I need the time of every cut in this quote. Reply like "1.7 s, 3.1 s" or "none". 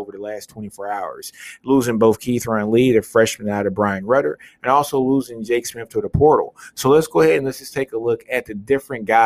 none